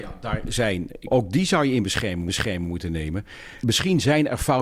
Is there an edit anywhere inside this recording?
yes; 2 cuts; at 1.0 s, 2.3 s

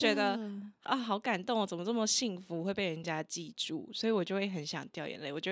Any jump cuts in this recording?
no; 0 cuts

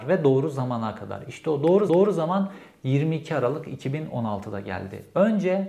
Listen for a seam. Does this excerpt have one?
yes; 1 cut; at 1.9 s

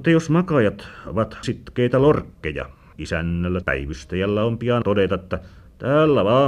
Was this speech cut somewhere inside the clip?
yes; 4 cuts; at 1.4 s, 2.9 s, 3.6 s, 4.8 s

